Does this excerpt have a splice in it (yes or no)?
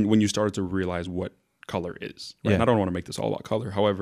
no